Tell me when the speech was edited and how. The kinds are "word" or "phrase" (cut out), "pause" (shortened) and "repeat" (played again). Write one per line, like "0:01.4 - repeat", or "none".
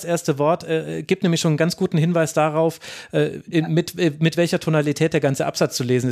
none